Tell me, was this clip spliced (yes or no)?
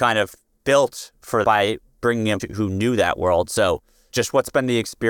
yes